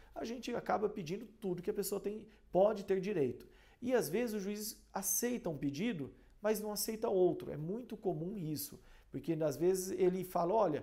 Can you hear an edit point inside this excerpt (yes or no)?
no